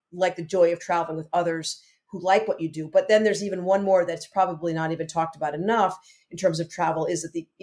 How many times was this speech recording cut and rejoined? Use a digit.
0